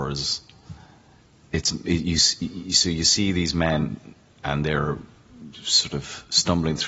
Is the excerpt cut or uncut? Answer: uncut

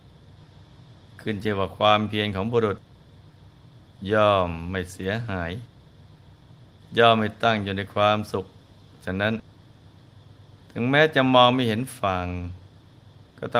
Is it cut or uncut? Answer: uncut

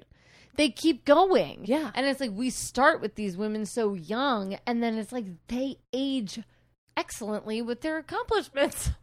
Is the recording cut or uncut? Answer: uncut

